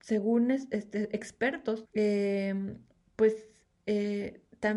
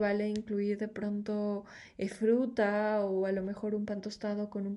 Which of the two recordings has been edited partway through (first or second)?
first